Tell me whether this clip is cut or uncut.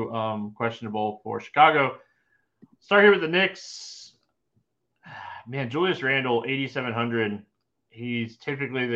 uncut